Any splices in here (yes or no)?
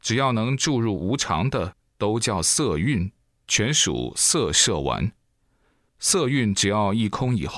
no